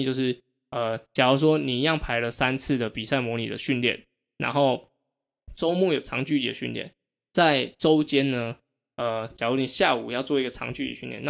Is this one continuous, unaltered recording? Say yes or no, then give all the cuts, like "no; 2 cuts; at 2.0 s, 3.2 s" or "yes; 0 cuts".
yes; 0 cuts